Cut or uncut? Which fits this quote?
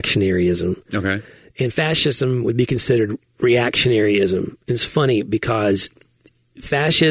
uncut